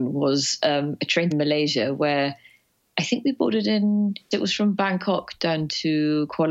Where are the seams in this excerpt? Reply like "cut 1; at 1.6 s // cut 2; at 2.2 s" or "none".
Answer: cut 1; at 1.3 s // cut 2; at 4.3 s